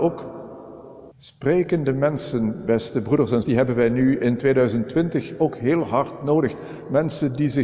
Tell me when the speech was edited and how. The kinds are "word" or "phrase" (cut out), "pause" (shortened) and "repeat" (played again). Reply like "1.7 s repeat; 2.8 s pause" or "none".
1.1 s pause; 3.4 s word